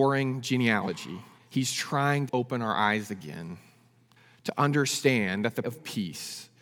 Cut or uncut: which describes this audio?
cut